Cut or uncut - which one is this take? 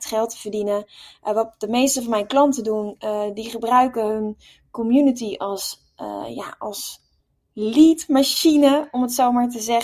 uncut